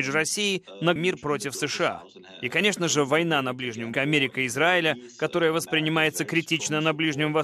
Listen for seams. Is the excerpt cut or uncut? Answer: cut